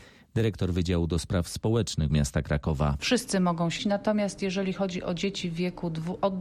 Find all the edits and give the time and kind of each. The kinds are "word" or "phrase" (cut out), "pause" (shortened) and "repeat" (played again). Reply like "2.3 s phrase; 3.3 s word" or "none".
2.1 s word; 3.8 s word

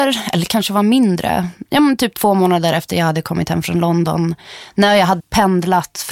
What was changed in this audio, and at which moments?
5.2 s word

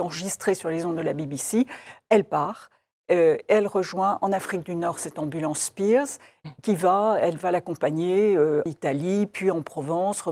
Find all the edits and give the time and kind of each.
8.7 s word

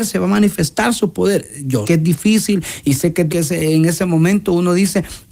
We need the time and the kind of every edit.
1.8 s word; 3.3 s phrase

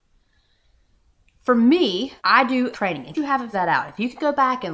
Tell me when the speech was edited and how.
2.2 s pause; 2.7 s word; 3.1 s word; 3.5 s word

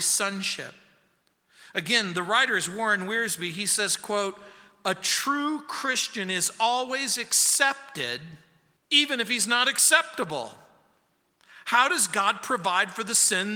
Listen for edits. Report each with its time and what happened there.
8.8 s pause

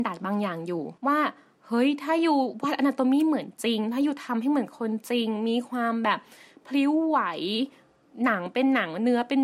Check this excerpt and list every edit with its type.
1.0 s pause

